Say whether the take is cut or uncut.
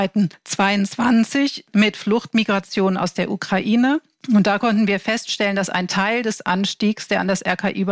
uncut